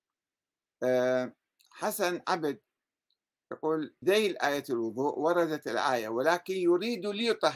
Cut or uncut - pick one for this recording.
cut